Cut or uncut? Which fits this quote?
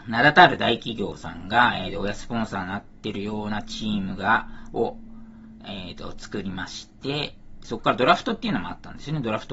uncut